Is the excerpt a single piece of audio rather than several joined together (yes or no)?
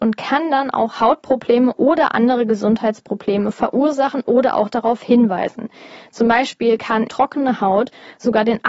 no